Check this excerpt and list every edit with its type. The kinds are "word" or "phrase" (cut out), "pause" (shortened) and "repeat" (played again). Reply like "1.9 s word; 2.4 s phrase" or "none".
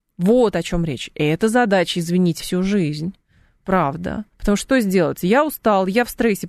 2.4 s word; 4.3 s pause